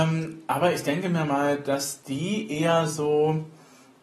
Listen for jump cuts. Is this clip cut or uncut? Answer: uncut